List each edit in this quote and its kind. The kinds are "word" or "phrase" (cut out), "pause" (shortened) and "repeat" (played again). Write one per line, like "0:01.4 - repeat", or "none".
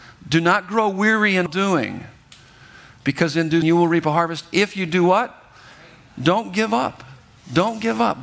0:01.5 - word
0:03.6 - word